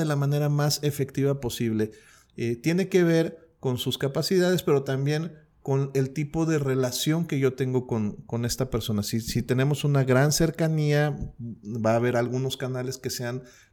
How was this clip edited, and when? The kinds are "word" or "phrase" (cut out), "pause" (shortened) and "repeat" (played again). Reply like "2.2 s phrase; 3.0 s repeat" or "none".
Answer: none